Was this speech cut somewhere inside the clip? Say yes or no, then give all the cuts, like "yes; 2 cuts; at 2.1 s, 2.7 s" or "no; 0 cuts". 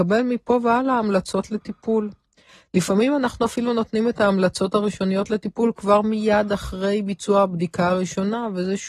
no; 0 cuts